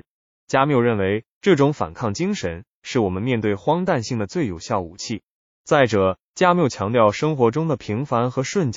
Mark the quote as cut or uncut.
uncut